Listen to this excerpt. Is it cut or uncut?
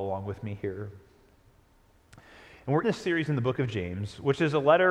cut